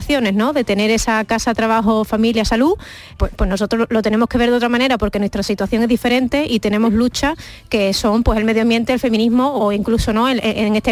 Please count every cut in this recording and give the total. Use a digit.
2